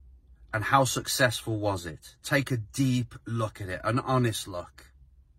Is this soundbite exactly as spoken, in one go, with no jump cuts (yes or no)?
yes